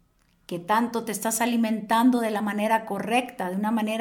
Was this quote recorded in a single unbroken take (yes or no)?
yes